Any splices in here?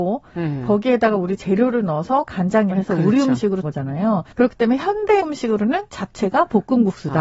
yes; 4 cuts; at 2.7 s, 3.6 s, 4.3 s, 5.2 s

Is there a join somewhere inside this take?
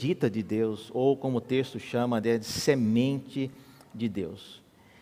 no; 0 cuts

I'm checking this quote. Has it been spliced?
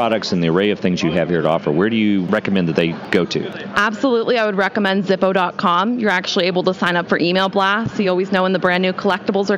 no; 0 cuts

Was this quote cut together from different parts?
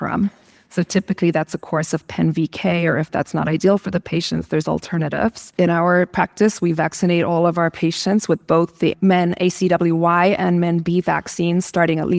no; 0 cuts

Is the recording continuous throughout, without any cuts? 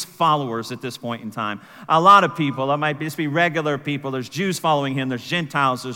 yes; 0 cuts

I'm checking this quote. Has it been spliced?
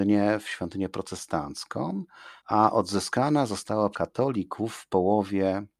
yes; 2 cuts; at 2.4 s, 3.9 s

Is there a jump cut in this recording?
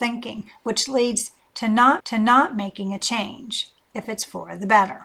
yes; 2 cuts; at 2.0 s, 3.9 s

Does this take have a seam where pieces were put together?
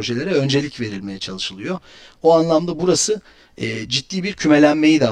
no; 0 cuts

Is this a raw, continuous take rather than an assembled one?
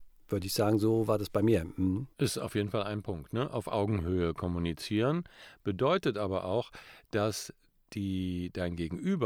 no; 1 cut; at 2.1 s

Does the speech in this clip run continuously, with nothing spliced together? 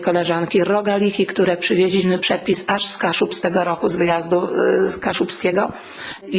yes; 0 cuts

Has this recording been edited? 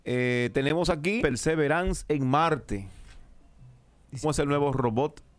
yes; 2 cuts; at 1.2 s, 4.2 s

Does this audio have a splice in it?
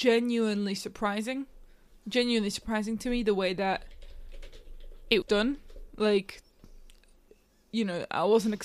yes; 1 cut; at 5.2 s

